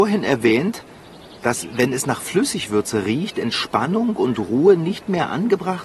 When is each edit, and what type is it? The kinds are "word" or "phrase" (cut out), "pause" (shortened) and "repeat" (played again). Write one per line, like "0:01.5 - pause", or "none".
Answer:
none